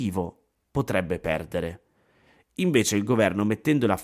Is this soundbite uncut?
yes; 0 cuts

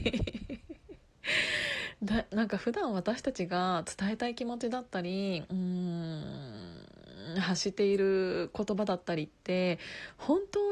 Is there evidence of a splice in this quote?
no; 0 cuts

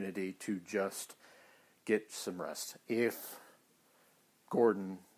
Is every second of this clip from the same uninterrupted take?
no; 1 cut; at 2.1 s

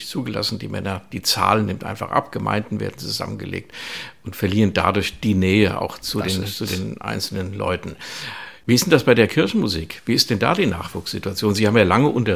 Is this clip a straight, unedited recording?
yes; 0 cuts

